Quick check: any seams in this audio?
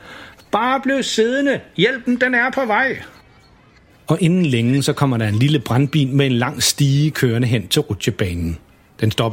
no; 0 cuts

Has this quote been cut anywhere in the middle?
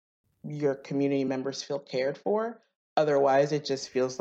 no; 0 cuts

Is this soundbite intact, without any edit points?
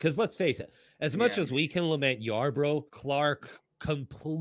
no; 1 cut; at 2.9 s

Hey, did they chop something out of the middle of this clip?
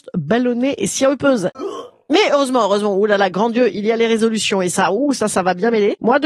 no; 0 cuts

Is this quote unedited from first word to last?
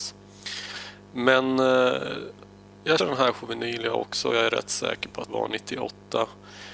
no; 3 cuts; at 3.0 s, 3.3 s, 5.3 s

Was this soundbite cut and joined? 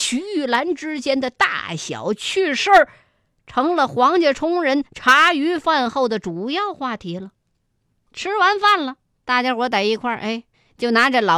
no; 0 cuts

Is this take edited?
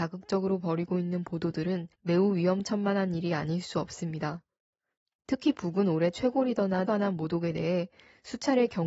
yes; 2 cuts; at 1.9 s, 6.9 s

